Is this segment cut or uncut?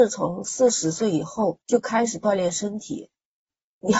cut